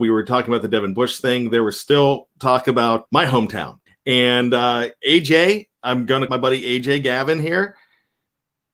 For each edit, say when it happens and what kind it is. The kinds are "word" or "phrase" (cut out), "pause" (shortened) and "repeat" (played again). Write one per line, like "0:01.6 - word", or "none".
0:03.1 - word
0:03.9 - pause
0:05.8 - pause
0:06.3 - phrase

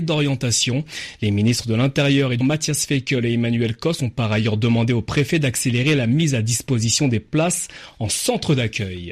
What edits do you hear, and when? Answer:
0:02.4 - word

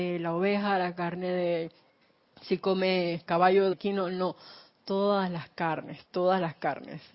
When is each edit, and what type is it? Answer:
0:03.7 - word

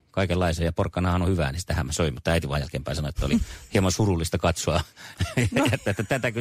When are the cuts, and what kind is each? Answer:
none

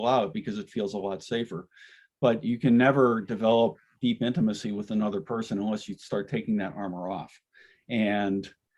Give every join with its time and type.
none

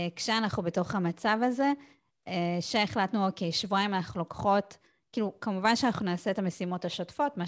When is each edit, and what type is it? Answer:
none

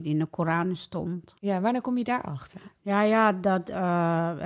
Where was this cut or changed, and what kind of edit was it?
0:01.4 - pause

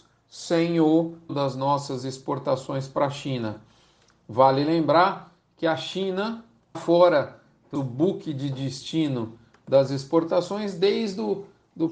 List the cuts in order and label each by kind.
0:01.3 - word
0:06.7 - word
0:07.7 - word

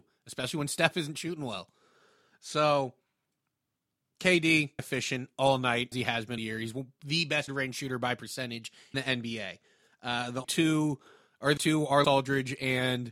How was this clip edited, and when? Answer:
0:04.8 - word
0:05.9 - word
0:06.4 - word
0:07.5 - word
0:08.9 - word
0:10.4 - word
0:11.6 - word
0:12.0 - word

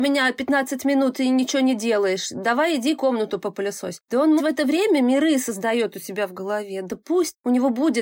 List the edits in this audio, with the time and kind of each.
0:04.4 - phrase

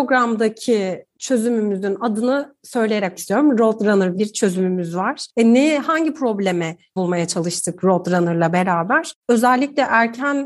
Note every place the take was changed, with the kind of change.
0:03.1 - word
0:04.2 - word
0:07.0 - word
0:09.2 - pause

